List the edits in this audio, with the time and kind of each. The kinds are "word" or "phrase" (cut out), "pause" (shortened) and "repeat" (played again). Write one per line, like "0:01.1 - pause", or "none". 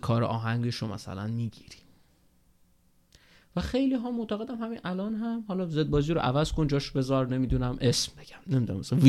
none